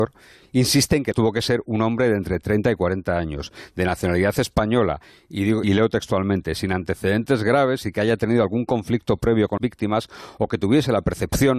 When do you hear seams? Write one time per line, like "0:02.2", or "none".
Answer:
0:01.1
0:05.6
0:09.6